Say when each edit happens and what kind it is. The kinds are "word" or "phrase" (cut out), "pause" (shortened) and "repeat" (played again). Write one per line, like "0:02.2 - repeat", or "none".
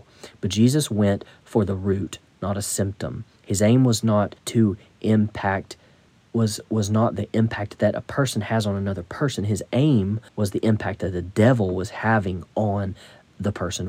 0:03.4 - pause
0:04.4 - pause
0:06.1 - pause
0:10.3 - pause